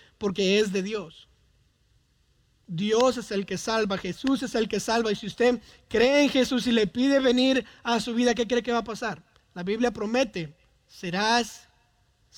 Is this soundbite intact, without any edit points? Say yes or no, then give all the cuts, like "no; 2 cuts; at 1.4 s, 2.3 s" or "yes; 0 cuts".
yes; 0 cuts